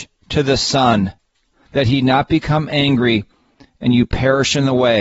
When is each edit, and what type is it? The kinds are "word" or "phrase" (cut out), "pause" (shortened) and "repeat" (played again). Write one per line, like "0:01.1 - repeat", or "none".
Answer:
none